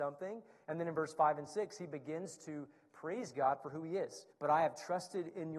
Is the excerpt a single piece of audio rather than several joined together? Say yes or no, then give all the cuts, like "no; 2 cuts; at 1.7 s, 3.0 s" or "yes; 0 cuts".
no; 1 cut; at 4.3 s